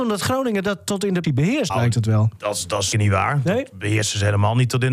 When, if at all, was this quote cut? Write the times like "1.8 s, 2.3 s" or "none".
1.2 s, 1.7 s, 2.9 s